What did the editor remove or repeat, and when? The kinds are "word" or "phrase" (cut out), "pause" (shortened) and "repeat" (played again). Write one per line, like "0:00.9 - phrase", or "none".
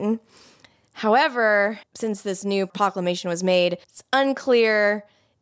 0:01.8 - pause
0:03.8 - pause